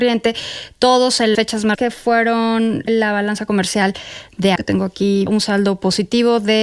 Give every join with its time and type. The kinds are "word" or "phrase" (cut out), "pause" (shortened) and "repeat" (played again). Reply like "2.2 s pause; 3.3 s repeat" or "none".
1.3 s word; 1.7 s word; 2.9 s word; 4.6 s word; 5.3 s word